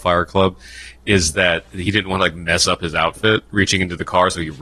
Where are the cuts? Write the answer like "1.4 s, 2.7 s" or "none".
none